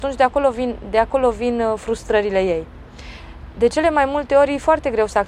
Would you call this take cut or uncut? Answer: uncut